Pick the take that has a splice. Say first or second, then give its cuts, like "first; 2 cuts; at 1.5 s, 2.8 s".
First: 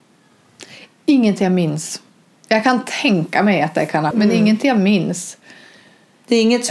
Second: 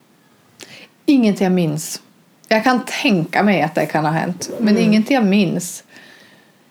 first; 1 cut; at 4.1 s